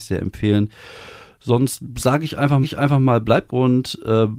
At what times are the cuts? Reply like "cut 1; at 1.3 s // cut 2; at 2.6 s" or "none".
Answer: cut 1; at 2.6 s // cut 2; at 3.5 s